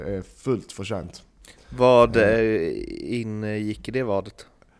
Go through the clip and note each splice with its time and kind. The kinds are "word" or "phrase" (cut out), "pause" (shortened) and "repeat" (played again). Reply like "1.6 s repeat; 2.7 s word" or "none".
none